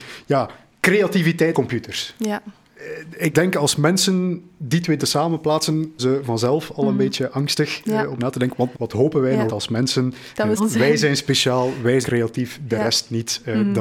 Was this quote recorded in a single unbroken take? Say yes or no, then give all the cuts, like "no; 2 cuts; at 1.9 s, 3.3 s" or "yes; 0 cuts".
no; 9 cuts; at 1.5 s, 3.3 s, 5.0 s, 6.0 s, 8.2 s, 8.7 s, 9.5 s, 10.6 s, 12.0 s